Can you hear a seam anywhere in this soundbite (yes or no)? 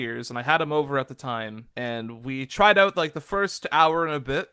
yes